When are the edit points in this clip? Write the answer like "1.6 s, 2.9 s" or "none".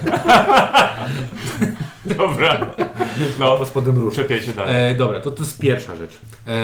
none